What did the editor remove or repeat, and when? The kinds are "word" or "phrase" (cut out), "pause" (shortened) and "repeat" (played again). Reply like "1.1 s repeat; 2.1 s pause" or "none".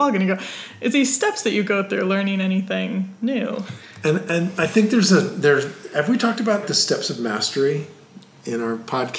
0.9 s word; 6.6 s word